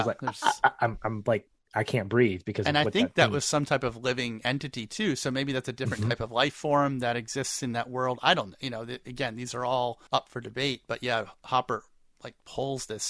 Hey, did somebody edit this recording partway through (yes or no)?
no